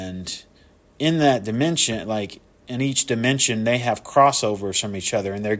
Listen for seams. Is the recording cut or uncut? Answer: uncut